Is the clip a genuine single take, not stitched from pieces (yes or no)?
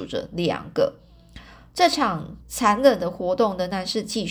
no